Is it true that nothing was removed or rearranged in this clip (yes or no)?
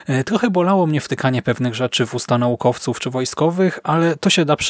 yes